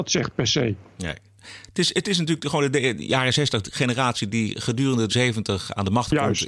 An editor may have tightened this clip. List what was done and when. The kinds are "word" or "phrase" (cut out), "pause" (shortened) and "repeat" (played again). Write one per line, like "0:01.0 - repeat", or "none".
0:05.1 - word